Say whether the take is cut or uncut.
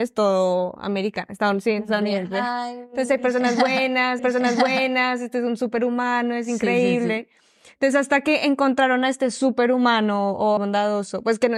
cut